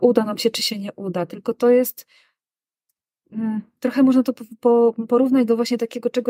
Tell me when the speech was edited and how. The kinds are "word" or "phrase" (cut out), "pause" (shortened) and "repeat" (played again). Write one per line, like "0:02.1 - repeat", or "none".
none